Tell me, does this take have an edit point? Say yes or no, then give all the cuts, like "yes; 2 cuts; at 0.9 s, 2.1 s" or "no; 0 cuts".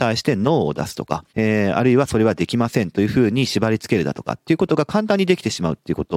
yes; 1 cut; at 1.3 s